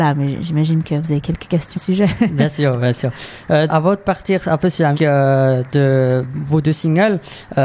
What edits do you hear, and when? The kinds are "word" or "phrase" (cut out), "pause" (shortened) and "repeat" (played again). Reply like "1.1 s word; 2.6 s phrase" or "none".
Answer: 1.7 s word; 3.7 s word; 4.9 s word